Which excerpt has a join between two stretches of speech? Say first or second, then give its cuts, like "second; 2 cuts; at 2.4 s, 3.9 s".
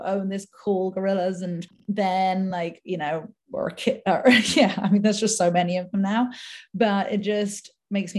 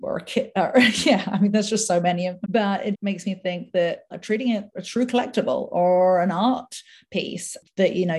second; 4 cuts; at 2.4 s, 2.9 s, 4.1 s, 4.7 s